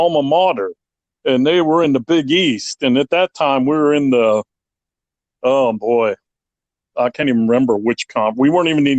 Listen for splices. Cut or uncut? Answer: uncut